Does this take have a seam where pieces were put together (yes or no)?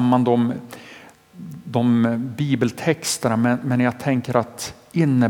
no